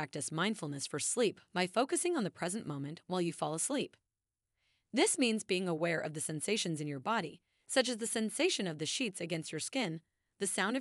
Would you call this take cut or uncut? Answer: uncut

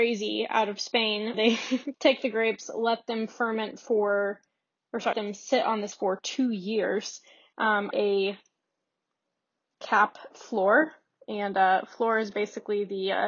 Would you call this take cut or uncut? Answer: cut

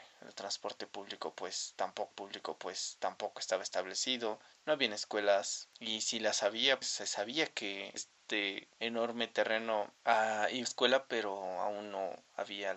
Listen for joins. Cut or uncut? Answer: cut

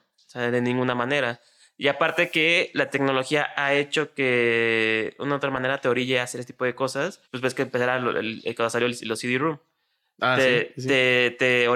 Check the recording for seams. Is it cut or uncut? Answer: cut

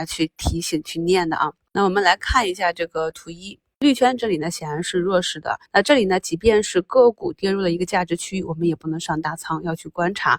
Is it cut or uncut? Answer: cut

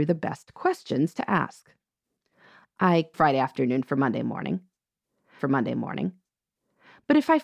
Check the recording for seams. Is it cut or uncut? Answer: cut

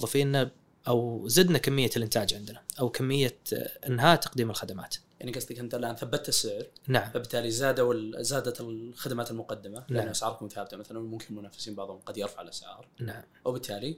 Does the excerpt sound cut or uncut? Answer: uncut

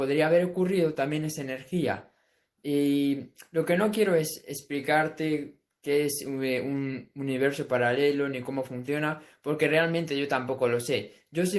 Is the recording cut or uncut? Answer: uncut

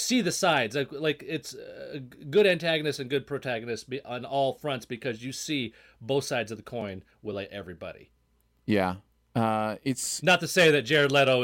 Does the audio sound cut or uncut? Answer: uncut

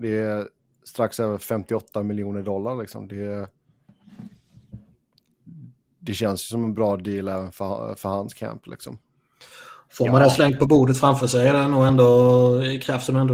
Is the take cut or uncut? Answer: uncut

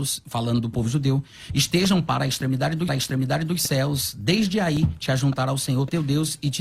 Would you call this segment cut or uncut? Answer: cut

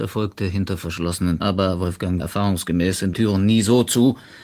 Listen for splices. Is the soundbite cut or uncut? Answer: cut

